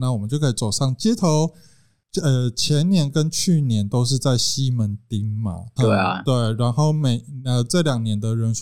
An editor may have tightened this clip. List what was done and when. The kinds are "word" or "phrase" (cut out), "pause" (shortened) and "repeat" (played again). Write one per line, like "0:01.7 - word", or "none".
0:05.8 - word